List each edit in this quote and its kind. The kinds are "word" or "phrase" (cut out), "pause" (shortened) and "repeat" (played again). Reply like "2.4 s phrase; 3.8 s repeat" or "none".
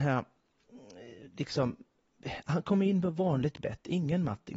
none